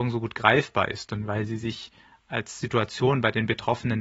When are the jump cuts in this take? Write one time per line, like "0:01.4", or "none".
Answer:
none